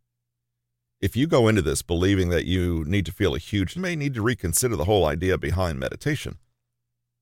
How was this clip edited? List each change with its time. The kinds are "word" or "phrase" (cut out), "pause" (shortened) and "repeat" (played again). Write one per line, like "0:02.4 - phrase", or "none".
0:03.7 - phrase